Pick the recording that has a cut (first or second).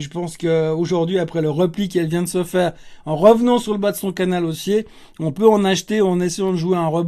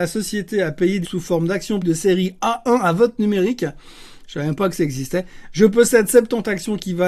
second